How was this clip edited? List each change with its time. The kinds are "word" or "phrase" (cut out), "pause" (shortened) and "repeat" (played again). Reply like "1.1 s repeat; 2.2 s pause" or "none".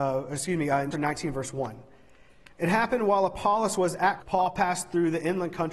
0.9 s word; 4.2 s word